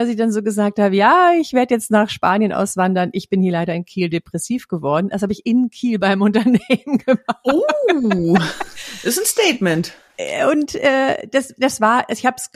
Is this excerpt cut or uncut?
uncut